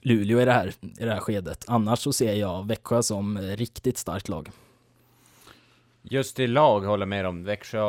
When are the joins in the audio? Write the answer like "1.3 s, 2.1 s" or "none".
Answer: none